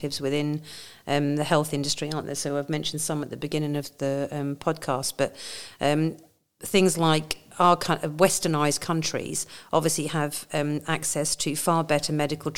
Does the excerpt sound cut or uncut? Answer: uncut